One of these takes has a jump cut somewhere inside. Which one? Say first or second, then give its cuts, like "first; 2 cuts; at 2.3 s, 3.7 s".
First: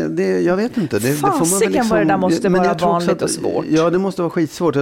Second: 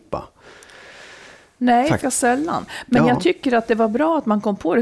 second; 1 cut; at 2.0 s